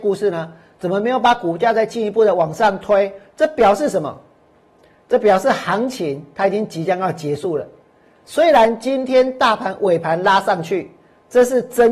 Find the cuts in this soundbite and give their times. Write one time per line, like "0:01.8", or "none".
none